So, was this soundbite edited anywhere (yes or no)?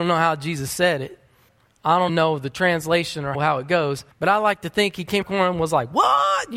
yes